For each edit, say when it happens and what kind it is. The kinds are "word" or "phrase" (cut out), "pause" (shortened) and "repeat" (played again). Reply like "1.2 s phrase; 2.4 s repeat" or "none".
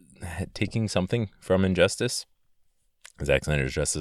none